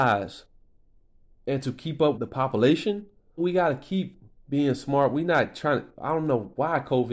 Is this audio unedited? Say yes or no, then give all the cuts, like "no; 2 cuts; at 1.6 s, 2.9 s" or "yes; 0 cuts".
no; 2 cuts; at 2.1 s, 3.4 s